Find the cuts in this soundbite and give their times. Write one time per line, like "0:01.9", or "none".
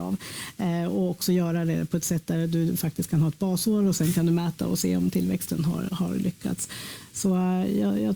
none